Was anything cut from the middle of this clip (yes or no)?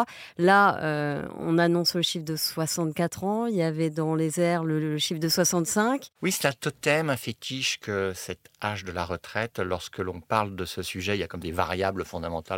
yes